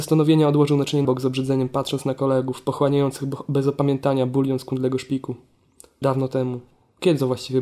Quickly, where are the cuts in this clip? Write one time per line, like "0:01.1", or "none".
0:01.0
0:06.0